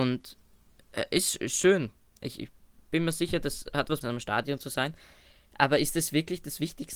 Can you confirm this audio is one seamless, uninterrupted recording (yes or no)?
no